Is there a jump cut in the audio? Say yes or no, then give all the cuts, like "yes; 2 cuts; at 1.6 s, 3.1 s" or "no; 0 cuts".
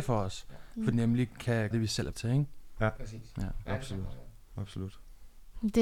yes; 3 cuts; at 0.9 s, 1.7 s, 2.1 s